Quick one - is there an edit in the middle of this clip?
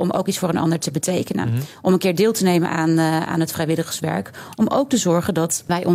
no; 0 cuts

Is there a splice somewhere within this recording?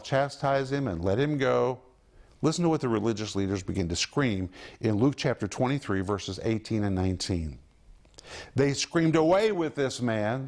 no; 0 cuts

